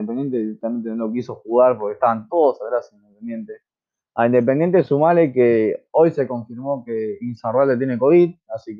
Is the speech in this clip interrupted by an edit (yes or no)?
no